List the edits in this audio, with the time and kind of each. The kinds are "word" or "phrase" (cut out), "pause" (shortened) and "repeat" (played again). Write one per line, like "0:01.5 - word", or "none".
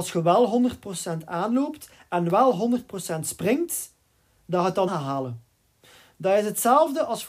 0:04.9 - word